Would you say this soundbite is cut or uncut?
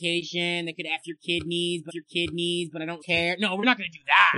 cut